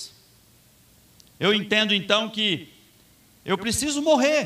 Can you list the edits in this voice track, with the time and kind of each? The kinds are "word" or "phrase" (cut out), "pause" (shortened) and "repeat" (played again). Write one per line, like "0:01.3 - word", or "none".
none